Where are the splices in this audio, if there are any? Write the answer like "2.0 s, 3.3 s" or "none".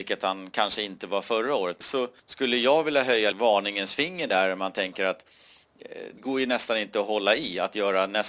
1.8 s, 3.3 s, 6.2 s